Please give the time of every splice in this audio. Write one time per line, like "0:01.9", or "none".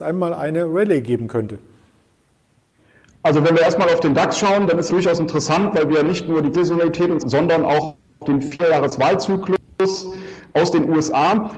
0:04.9
0:06.5
0:07.2